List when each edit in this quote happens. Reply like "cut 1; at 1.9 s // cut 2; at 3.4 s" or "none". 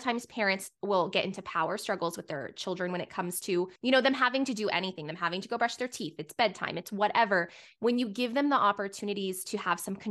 cut 1; at 3.8 s